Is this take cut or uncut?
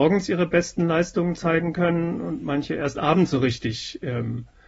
uncut